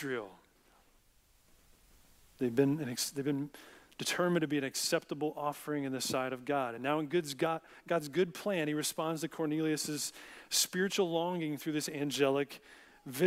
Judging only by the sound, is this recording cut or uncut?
uncut